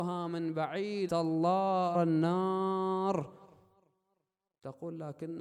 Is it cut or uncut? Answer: cut